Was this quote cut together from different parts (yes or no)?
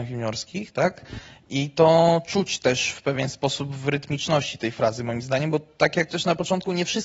yes